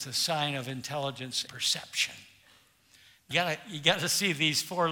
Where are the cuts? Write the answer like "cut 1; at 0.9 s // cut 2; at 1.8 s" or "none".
cut 1; at 1.5 s // cut 2; at 3.3 s